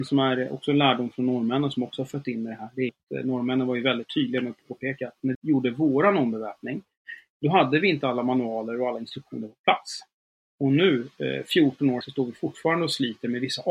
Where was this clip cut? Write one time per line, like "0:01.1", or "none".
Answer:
0:02.9
0:05.3
0:12.0